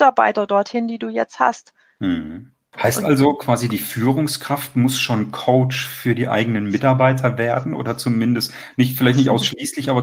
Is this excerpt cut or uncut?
uncut